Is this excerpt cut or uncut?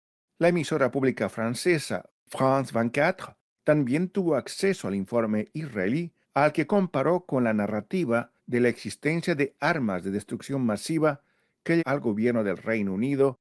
cut